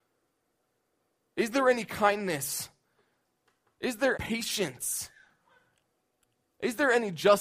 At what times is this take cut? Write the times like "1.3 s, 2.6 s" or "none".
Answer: 4.1 s

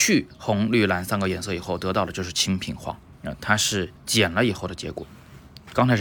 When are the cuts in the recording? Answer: 3.1 s, 4.0 s

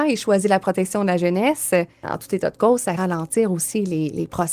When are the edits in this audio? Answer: 2.0 s, 3.0 s

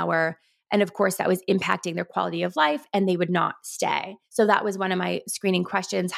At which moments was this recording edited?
none

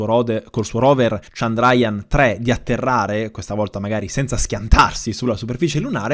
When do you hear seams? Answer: 1.3 s

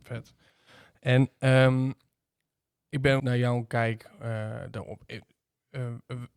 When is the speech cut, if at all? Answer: 3.2 s

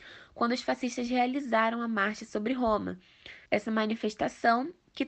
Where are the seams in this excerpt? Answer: 3.5 s

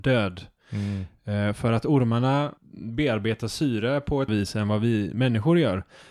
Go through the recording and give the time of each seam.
4.3 s

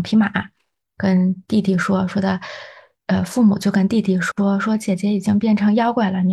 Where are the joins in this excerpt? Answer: none

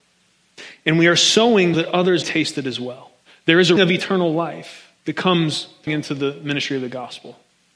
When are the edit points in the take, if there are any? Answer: 1.7 s, 2.2 s, 3.2 s, 3.8 s, 5.0 s, 5.9 s

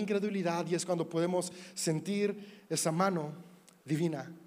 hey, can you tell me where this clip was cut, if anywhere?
none

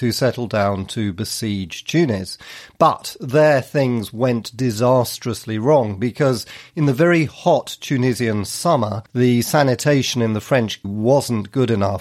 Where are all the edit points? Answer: 9.1 s, 10.8 s

